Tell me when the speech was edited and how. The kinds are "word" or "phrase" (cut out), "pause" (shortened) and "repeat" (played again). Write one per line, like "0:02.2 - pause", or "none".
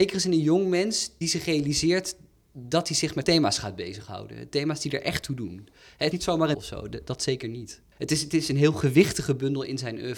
0:01.2 - word
0:03.2 - word
0:06.1 - word
0:06.5 - word

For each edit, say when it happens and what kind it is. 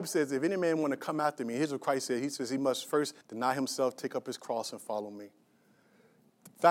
0:03.2 - pause

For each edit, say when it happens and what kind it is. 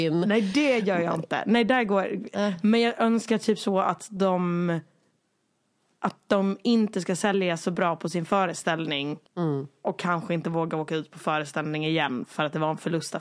0:09.3 - pause

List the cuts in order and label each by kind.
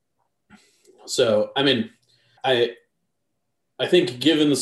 0:02.4 - word

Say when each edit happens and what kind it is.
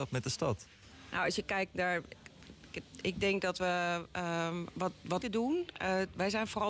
0:05.2 - phrase

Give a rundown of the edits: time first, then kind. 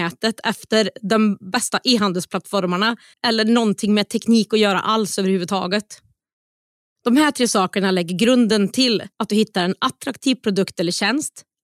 0:03.1 - pause
0:09.1 - pause

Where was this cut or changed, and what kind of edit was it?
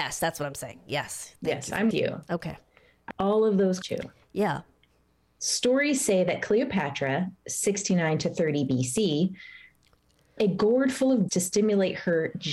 0:01.9 - word
0:03.1 - word
0:03.8 - word
0:10.4 - word
0:11.3 - word

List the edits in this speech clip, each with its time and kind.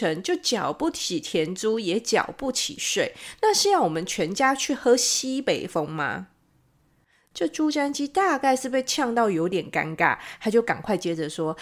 none

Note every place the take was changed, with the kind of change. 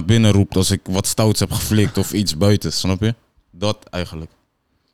none

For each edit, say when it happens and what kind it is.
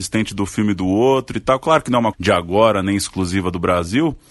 0:02.1 - word

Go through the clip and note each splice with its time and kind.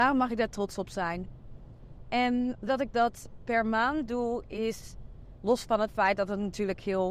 0:02.7 - word

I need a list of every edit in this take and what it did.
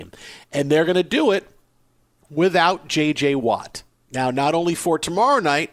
none

